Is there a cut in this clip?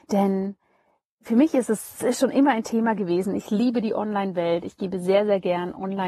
no; 0 cuts

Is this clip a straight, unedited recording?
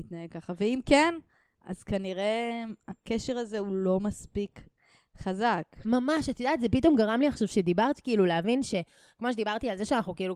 yes; 0 cuts

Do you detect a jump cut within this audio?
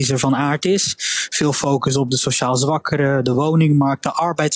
no; 0 cuts

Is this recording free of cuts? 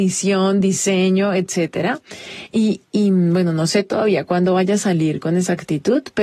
yes; 0 cuts

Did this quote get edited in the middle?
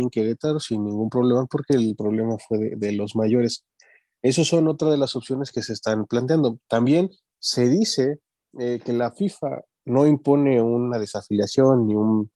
no; 0 cuts

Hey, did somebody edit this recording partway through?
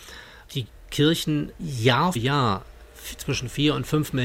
yes; 2 cuts; at 1.6 s, 2.2 s

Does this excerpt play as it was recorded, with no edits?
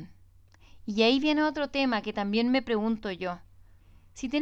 yes; 0 cuts

